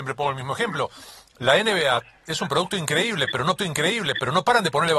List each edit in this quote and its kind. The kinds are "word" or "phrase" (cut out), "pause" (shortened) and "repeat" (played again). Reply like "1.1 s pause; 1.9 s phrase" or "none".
3.6 s repeat